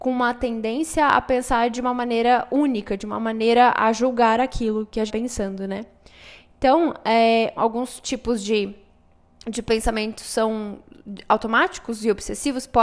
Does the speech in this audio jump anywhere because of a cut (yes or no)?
yes